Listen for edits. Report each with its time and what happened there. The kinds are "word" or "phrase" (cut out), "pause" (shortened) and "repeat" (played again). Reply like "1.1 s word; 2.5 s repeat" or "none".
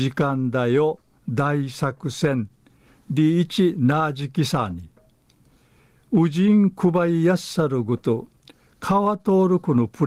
none